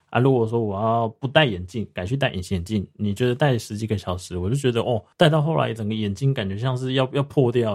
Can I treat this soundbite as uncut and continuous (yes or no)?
no